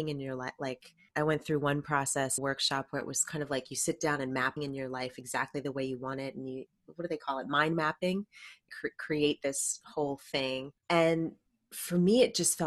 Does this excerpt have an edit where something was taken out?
yes; 4 cuts; at 2.4 s, 4.6 s, 8.7 s, 10.8 s

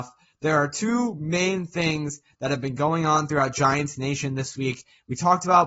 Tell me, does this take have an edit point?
no; 0 cuts

